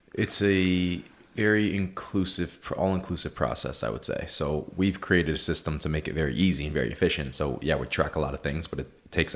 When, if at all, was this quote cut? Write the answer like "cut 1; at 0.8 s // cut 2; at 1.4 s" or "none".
none